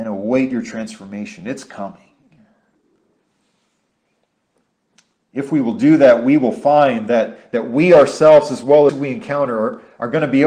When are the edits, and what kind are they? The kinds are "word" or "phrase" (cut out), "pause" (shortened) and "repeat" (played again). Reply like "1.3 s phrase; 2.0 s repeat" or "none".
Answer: 8.9 s phrase